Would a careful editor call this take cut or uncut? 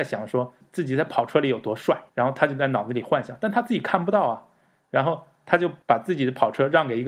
cut